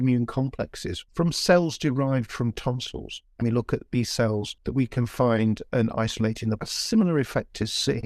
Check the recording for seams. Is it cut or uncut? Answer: cut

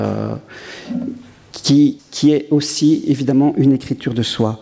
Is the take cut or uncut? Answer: cut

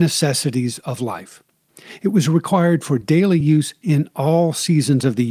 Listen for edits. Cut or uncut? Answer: uncut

